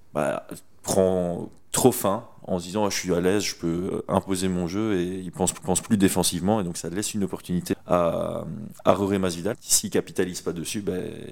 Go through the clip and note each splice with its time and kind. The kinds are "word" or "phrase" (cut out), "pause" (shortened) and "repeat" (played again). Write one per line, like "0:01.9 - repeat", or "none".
0:05.6 - repeat
0:07.7 - word
0:08.8 - pause
0:09.5 - word